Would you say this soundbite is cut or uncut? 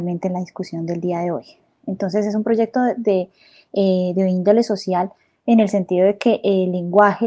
uncut